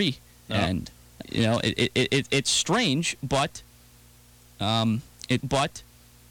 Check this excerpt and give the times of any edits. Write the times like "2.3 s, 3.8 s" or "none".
1.2 s, 5.4 s